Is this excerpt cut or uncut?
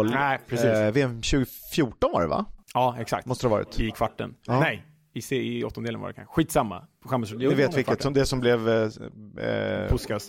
cut